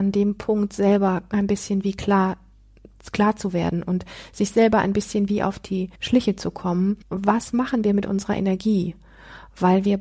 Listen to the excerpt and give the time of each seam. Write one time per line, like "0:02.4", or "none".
0:05.9
0:07.0